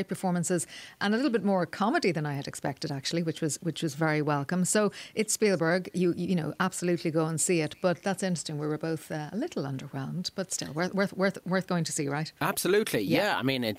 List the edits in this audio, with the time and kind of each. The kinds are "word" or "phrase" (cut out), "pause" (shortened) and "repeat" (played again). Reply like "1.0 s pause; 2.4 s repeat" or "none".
12.4 s pause